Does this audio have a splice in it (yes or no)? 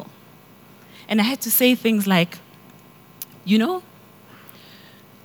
no